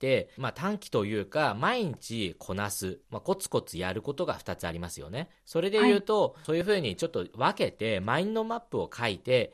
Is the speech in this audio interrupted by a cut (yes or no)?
yes